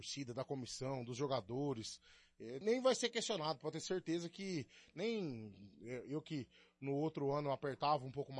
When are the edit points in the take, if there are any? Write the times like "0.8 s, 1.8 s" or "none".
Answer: 2.6 s